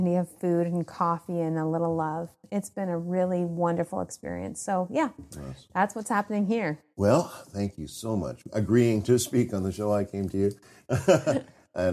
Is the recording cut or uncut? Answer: cut